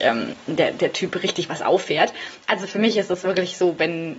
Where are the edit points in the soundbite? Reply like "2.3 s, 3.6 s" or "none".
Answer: none